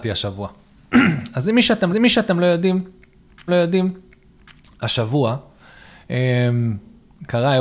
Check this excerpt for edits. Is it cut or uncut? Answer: cut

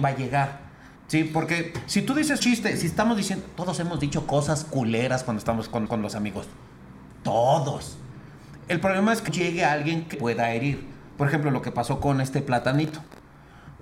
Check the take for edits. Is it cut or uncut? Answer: cut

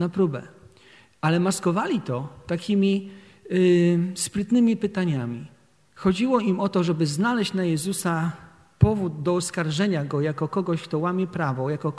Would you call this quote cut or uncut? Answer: uncut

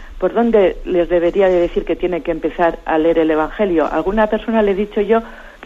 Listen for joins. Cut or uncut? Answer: uncut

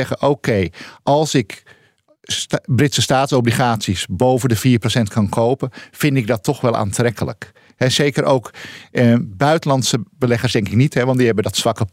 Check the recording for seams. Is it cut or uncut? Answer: uncut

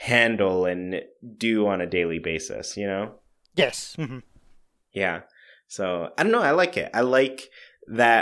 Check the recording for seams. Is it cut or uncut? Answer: uncut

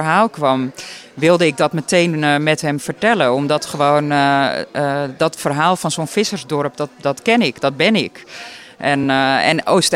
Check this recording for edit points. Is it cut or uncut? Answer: uncut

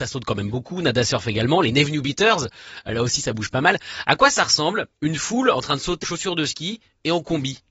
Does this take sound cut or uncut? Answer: cut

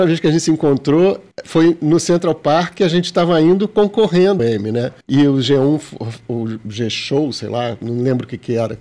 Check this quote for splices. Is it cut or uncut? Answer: cut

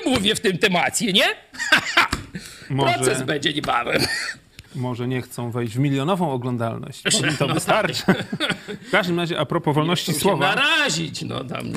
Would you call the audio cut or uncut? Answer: cut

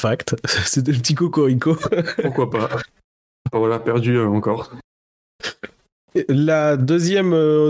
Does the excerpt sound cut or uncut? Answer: uncut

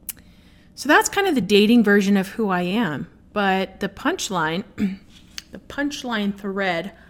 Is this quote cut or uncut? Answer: uncut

